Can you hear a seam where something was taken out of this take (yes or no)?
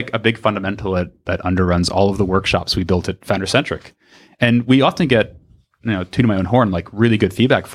no